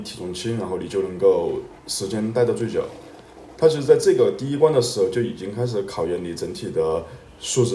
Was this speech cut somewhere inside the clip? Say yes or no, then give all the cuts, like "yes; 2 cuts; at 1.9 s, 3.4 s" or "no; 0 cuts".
yes; 1 cut; at 1.8 s